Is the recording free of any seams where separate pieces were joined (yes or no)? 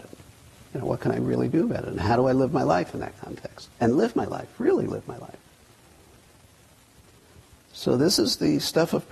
no